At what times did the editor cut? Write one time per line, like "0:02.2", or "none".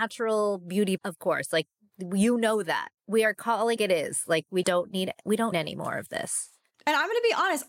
0:01.0
0:03.0
0:03.8
0:04.6
0:05.5